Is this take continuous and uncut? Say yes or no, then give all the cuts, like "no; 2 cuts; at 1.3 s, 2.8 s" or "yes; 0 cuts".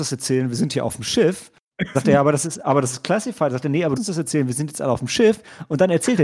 no; 2 cuts; at 1.9 s, 4.0 s